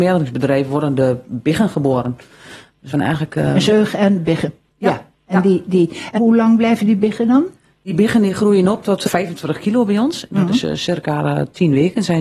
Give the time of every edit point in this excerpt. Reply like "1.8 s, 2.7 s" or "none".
2.9 s, 6.2 s, 9.1 s